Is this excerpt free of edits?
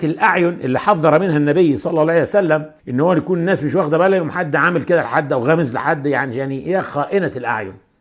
no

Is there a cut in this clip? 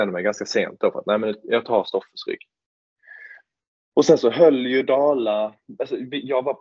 no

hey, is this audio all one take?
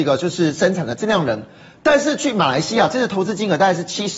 yes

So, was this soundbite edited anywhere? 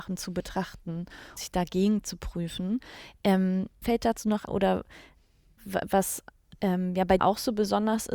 yes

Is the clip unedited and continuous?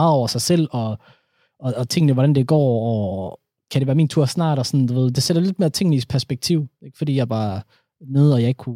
yes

